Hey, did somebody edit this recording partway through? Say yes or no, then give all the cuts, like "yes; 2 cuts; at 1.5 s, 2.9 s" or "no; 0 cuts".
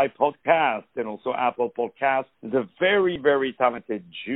yes; 1 cut; at 2.3 s